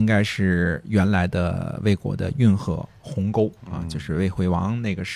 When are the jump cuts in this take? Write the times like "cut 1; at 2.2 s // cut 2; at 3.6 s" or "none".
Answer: cut 1; at 3.6 s